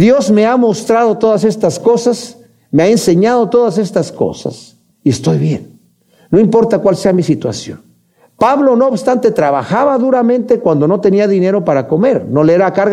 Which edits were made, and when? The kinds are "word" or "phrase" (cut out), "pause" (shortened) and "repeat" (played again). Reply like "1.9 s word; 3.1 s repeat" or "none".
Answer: 4.9 s pause